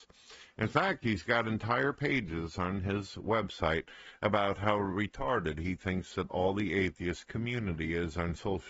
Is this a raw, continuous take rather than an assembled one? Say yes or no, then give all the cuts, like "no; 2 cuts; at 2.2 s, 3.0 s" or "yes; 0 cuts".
yes; 0 cuts